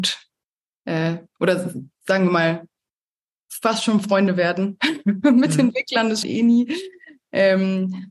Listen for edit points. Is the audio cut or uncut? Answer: cut